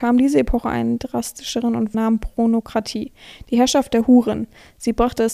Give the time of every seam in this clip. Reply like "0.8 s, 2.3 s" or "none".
1.9 s